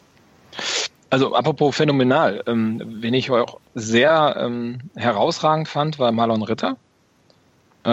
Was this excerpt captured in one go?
yes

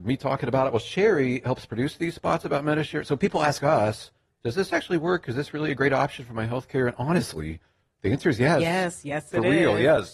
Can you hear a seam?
no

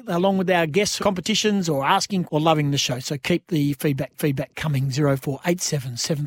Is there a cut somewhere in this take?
yes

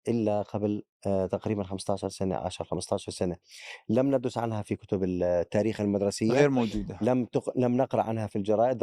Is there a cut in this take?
no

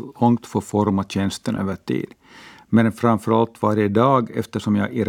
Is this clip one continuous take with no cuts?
yes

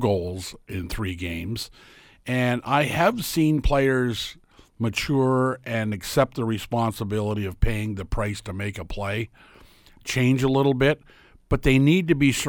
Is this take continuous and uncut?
yes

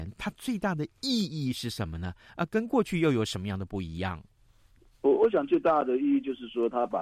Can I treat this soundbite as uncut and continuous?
yes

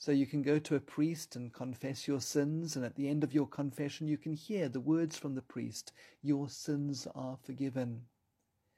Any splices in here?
no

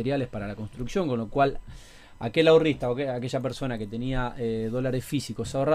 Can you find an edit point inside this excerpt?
no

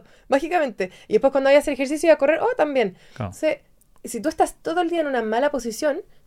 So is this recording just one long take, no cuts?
yes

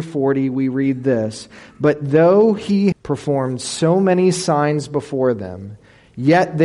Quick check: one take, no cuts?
no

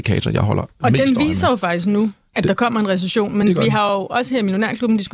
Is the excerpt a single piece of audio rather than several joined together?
yes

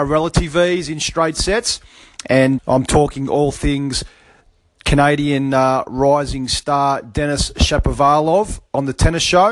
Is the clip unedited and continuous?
no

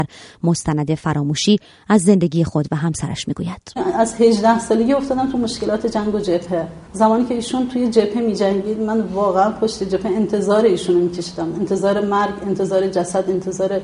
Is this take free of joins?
yes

